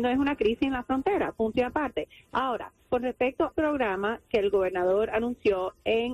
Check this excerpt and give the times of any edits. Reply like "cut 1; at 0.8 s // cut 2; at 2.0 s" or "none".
cut 1; at 3.5 s